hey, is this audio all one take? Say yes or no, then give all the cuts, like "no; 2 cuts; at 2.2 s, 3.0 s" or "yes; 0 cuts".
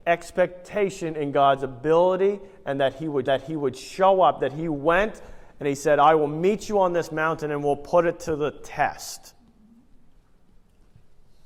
no; 1 cut; at 3.3 s